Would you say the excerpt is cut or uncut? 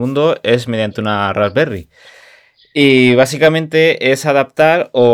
uncut